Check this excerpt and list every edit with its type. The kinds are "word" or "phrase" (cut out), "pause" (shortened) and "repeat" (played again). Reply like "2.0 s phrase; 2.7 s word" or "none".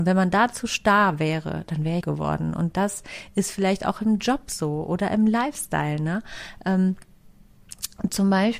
2.0 s phrase